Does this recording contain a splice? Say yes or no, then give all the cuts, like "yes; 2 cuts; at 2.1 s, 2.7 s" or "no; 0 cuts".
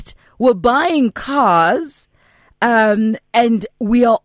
no; 0 cuts